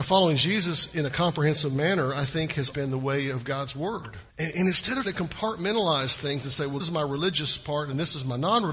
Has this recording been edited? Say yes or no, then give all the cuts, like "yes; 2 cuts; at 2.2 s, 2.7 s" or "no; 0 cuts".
yes; 4 cuts; at 2.7 s, 4.3 s, 5.0 s, 6.8 s